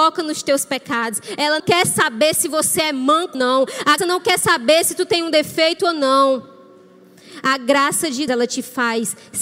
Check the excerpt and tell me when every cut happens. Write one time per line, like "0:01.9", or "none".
0:01.6
0:03.3
0:04.0
0:08.3